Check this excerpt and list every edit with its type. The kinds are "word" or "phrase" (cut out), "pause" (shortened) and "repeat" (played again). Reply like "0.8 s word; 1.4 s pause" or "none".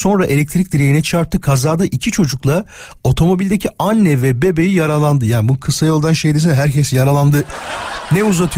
none